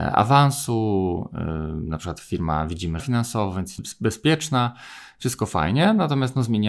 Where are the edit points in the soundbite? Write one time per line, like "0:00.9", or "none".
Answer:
0:03.0
0:03.8